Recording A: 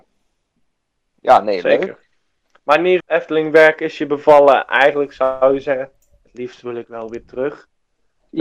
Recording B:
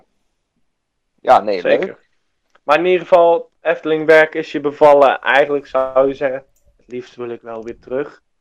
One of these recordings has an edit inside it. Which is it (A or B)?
A